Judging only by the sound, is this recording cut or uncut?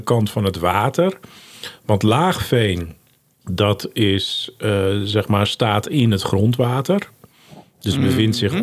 uncut